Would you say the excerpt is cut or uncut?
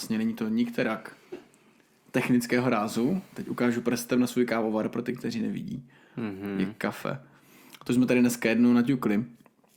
uncut